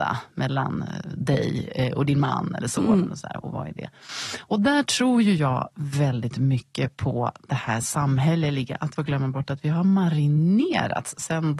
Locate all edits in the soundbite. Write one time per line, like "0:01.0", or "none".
0:09.0